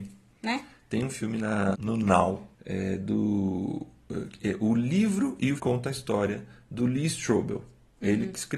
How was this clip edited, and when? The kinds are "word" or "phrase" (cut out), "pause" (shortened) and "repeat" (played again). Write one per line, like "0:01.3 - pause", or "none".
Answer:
0:01.7 - word
0:02.5 - pause
0:05.6 - word